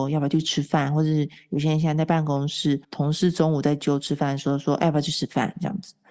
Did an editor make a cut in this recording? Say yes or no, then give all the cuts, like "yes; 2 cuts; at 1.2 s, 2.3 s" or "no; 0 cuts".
yes; 1 cut; at 2.8 s